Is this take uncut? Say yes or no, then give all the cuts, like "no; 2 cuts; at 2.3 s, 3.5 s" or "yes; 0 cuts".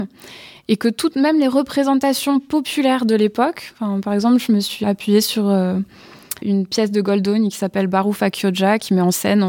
no; 2 cuts; at 4.8 s, 6.4 s